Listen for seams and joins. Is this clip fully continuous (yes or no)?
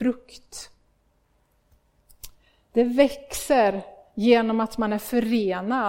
yes